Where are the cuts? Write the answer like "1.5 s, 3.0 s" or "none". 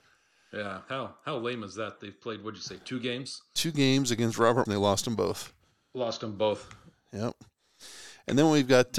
4.7 s